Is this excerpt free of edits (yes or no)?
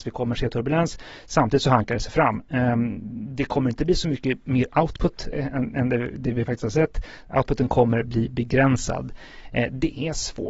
no